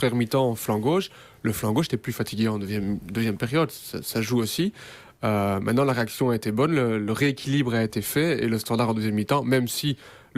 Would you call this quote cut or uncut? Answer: uncut